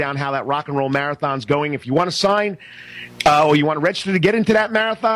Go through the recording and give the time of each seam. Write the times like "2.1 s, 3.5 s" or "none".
none